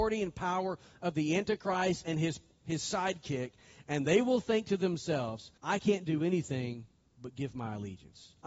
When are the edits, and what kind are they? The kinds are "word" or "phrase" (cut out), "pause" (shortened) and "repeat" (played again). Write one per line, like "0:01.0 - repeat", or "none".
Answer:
0:05.6 - pause